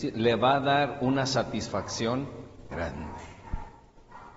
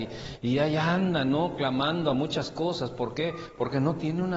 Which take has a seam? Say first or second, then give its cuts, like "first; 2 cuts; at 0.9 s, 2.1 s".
first; 1 cut; at 2.7 s